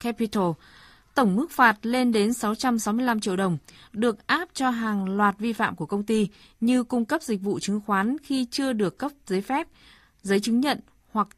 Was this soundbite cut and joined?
no; 0 cuts

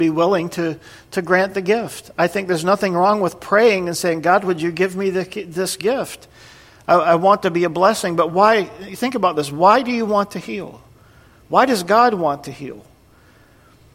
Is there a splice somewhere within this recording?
no; 0 cuts

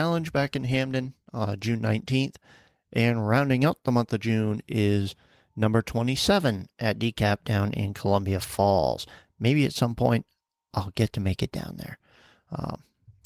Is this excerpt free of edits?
yes; 0 cuts

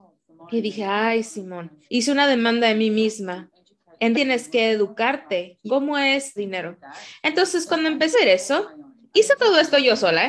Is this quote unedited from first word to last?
no; 5 cuts; at 1.9 s, 4.1 s, 5.7 s, 6.4 s, 8.1 s

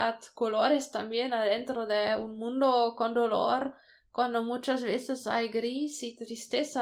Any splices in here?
no; 0 cuts

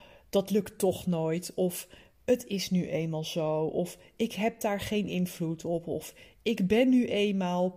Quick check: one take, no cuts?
yes; 0 cuts

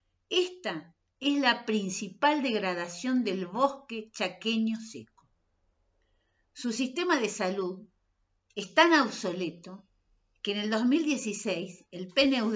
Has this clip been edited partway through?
no; 0 cuts

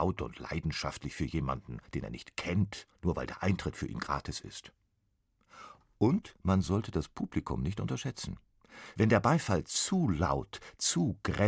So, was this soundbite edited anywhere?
yes; 3 cuts; at 1.9 s, 2.9 s, 6.4 s

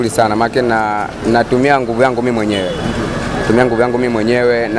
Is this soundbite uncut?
yes; 0 cuts

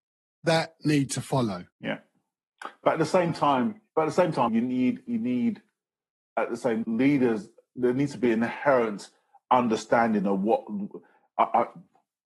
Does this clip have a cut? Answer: yes; 4 cuts; at 1.7 s, 3.9 s, 4.5 s, 6.8 s

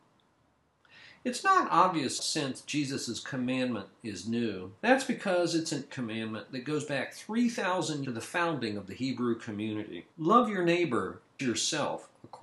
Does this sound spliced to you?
yes; 6 cuts; at 2.2 s, 4.8 s, 5.9 s, 8.0 s, 10.1 s, 11.4 s

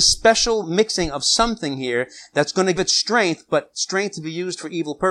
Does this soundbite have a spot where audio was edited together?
yes; 1 cut; at 2.8 s

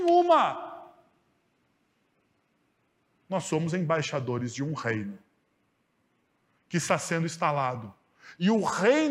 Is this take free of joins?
yes; 0 cuts

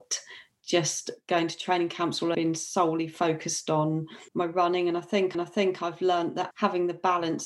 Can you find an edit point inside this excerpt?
yes; 4 cuts; at 2.3 s, 4.3 s, 5.3 s, 6.5 s

